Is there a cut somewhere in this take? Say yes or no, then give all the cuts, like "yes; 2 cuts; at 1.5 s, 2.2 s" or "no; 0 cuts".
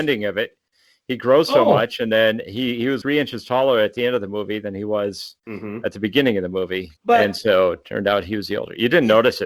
yes; 3 cuts; at 3.0 s, 5.4 s, 7.0 s